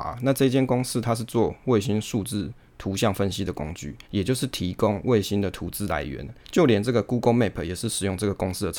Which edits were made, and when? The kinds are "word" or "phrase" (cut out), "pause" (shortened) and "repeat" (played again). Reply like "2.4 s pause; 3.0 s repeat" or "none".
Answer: 4.0 s pause; 6.4 s pause